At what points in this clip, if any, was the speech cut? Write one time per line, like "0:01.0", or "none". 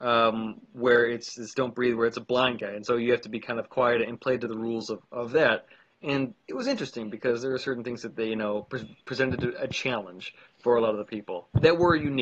none